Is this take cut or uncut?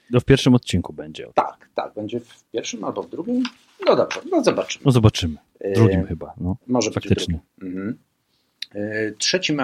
uncut